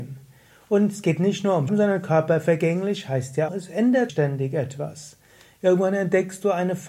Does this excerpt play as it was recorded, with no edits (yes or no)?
no